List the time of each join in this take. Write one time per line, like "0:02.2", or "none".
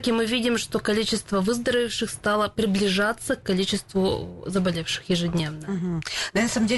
none